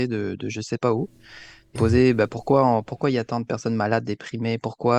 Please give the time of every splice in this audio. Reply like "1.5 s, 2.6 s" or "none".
1.8 s